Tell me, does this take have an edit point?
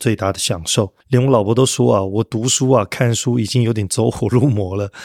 yes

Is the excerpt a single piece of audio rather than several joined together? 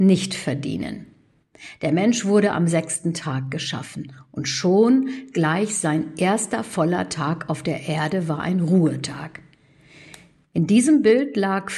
yes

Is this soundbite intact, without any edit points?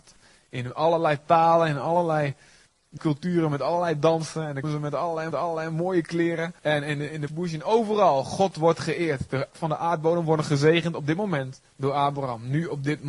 no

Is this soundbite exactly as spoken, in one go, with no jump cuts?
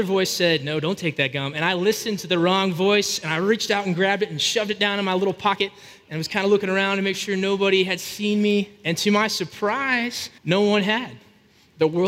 no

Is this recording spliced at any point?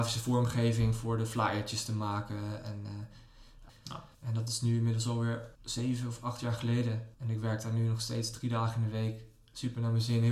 yes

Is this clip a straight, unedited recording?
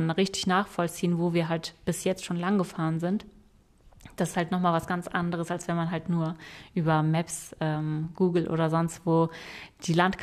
yes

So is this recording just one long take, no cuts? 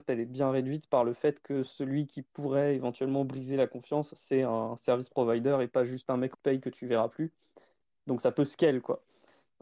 no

